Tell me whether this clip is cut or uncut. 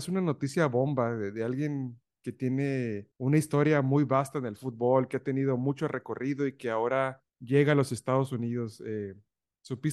cut